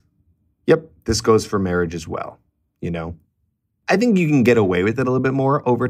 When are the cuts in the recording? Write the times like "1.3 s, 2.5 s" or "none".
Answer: none